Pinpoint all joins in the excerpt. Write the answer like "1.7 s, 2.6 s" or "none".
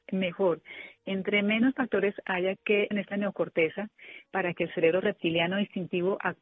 2.9 s